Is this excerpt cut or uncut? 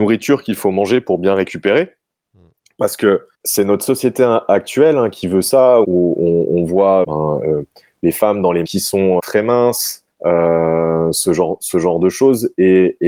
cut